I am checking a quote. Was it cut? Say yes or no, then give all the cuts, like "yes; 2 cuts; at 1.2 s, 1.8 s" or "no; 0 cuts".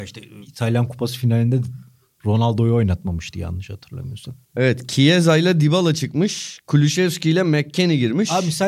yes; 1 cut; at 4.4 s